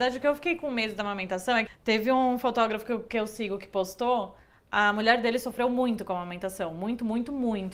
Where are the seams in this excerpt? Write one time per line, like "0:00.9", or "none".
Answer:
none